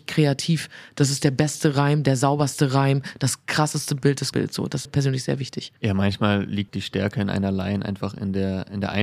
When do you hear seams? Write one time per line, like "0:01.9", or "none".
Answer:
0:04.3
0:04.8
0:05.8
0:06.7